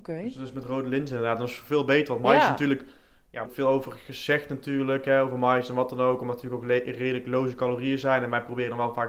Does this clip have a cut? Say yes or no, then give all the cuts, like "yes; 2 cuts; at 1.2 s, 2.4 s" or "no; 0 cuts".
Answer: yes; 1 cut; at 3.5 s